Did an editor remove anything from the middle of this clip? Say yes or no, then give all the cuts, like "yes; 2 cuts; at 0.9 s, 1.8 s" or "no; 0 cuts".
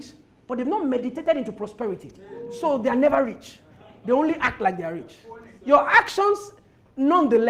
no; 0 cuts